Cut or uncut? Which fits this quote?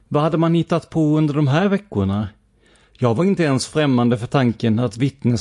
uncut